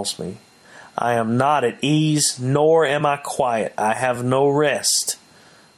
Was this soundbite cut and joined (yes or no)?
no